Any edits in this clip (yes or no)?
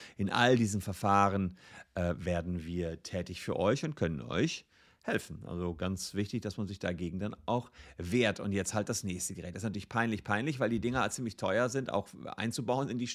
no